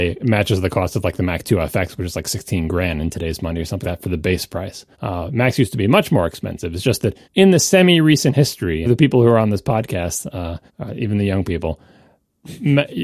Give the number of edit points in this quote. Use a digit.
5